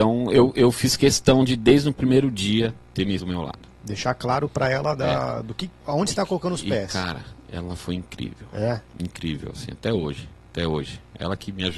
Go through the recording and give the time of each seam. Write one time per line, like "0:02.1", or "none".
0:03.2
0:05.8
0:10.4